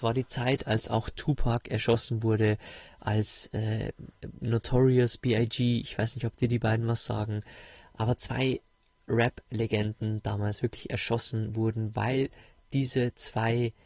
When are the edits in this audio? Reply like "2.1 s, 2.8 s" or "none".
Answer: none